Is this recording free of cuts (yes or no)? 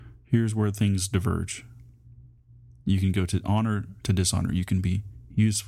yes